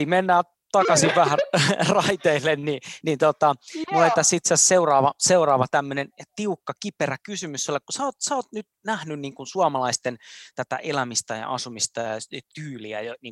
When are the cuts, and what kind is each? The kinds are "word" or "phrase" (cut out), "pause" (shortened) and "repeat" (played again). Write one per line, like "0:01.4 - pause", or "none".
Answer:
none